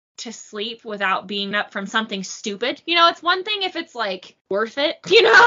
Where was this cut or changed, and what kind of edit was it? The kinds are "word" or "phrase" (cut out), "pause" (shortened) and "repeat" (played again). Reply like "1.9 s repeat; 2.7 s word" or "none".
1.5 s word; 4.4 s pause